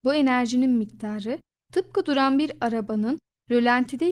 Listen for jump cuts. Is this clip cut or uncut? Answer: uncut